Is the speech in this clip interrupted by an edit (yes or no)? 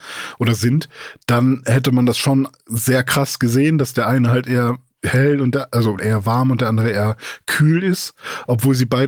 yes